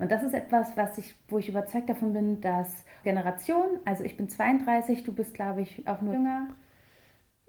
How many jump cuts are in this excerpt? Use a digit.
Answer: 2